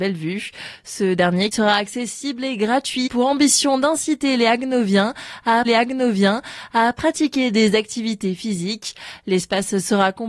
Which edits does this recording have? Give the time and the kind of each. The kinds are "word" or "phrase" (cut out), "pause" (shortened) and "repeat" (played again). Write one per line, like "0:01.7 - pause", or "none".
0:01.5 - word
0:03.1 - word
0:05.6 - repeat